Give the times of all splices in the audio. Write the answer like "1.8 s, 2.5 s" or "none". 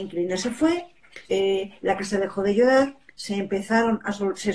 1.2 s, 3.1 s